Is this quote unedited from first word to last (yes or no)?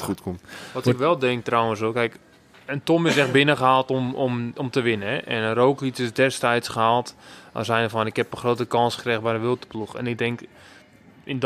yes